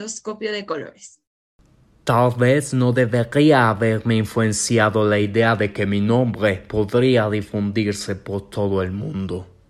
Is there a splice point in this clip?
no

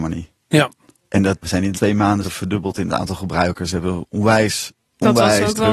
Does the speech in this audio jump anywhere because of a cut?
yes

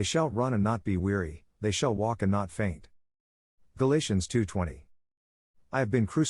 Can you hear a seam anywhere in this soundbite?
no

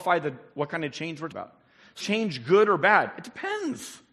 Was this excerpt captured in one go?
no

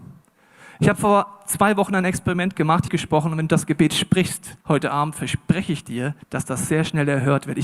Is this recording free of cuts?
no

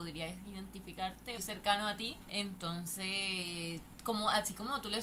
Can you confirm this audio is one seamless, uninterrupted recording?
no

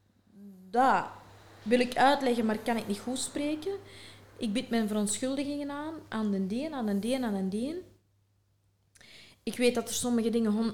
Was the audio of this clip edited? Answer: no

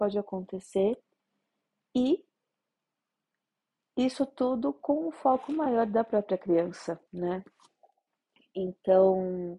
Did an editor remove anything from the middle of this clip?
yes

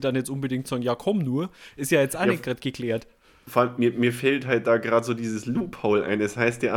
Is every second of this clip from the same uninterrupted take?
yes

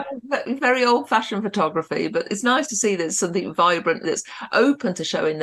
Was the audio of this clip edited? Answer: yes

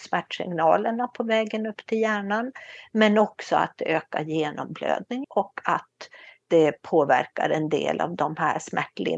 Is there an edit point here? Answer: yes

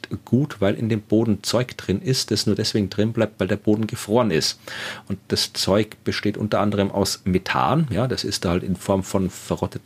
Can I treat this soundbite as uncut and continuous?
yes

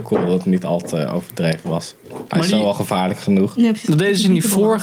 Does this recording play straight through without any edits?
no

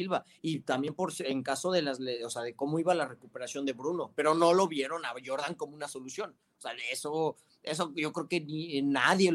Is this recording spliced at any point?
no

